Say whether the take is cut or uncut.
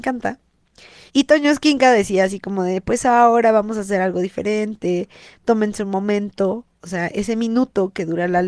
cut